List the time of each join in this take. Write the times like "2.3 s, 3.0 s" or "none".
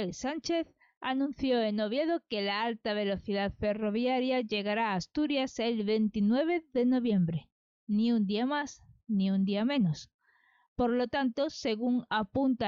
none